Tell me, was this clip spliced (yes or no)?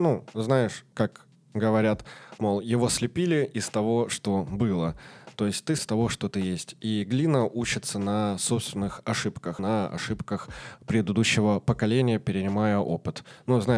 yes